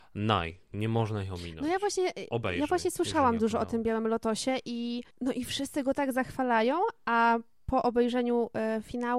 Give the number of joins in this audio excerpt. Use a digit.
1